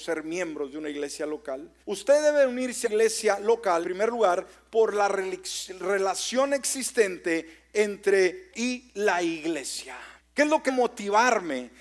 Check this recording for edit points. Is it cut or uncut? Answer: cut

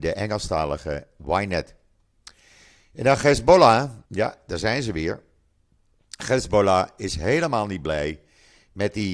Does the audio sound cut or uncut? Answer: cut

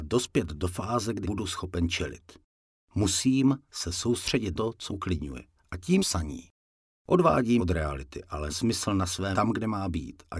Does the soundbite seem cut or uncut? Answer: cut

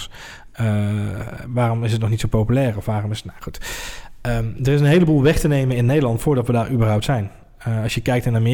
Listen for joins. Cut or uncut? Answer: uncut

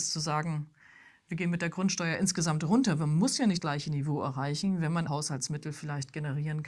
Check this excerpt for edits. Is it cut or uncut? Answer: cut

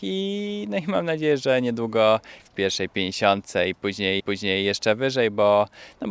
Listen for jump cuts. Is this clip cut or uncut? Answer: cut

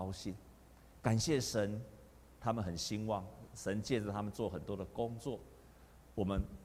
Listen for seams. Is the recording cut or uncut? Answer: cut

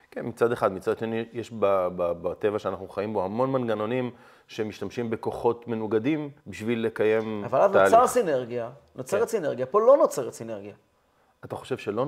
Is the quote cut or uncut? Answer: cut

